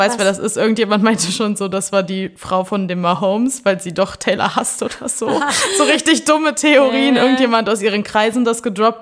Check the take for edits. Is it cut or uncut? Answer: uncut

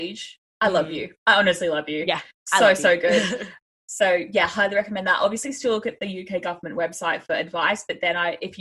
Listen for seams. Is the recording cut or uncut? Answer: uncut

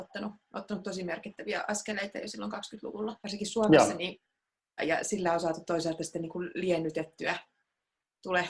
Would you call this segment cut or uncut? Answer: cut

